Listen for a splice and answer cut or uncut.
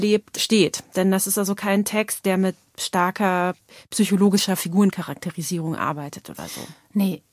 uncut